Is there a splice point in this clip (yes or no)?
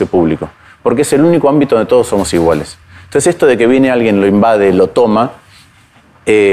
no